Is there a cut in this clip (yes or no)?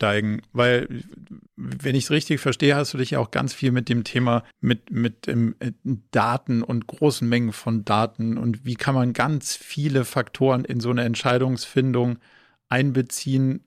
yes